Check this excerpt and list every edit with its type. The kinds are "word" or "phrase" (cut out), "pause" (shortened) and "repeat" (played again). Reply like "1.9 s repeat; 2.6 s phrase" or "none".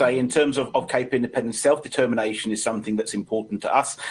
none